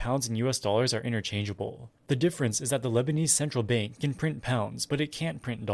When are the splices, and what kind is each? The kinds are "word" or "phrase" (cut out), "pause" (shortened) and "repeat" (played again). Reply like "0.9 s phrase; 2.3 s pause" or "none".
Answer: 2.0 s pause